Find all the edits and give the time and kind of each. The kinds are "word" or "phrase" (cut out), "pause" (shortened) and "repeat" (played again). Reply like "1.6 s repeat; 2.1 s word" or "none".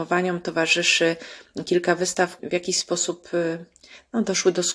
2.4 s word